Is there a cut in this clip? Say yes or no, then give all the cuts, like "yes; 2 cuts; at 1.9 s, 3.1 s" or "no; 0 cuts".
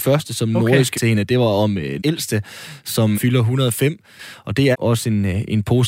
yes; 4 cuts; at 0.9 s, 2.0 s, 3.1 s, 4.7 s